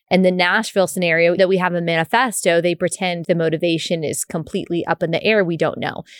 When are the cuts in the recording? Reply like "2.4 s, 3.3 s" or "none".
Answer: 1.4 s, 3.2 s

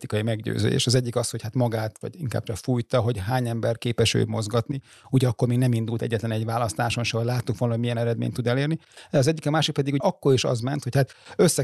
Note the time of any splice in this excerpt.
2.0 s, 2.5 s, 10.0 s

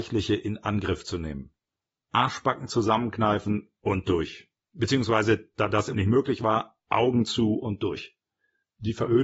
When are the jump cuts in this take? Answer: 5.9 s

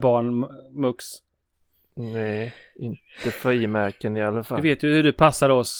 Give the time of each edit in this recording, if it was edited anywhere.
none

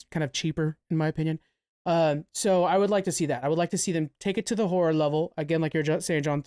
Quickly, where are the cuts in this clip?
none

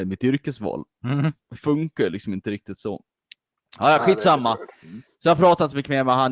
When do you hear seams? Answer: none

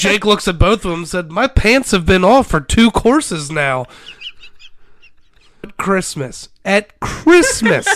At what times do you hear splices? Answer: 5.6 s

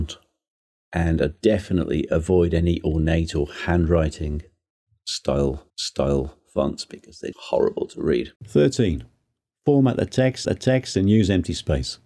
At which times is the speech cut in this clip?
5.7 s, 7.3 s, 8.4 s, 10.4 s

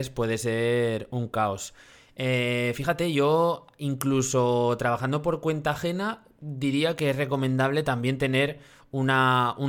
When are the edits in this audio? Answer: none

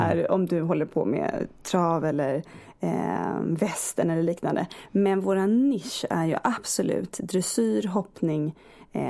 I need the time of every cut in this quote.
none

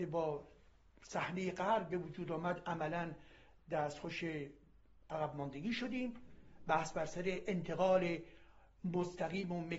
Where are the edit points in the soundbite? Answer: none

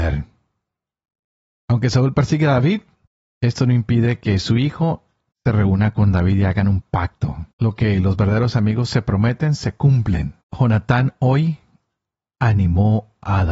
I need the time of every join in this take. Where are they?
3.1 s, 5.3 s, 7.5 s, 10.4 s

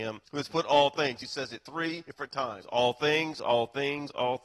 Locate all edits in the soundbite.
none

